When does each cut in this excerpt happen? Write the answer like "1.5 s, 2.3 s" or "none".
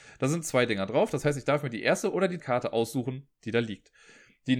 2.4 s